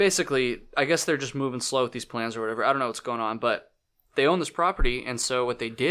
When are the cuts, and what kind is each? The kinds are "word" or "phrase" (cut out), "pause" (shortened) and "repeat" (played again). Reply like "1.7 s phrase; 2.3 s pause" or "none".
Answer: none